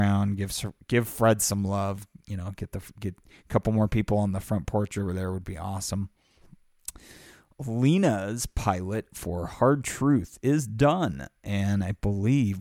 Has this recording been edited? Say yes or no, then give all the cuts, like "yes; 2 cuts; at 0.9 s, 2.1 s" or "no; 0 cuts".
no; 0 cuts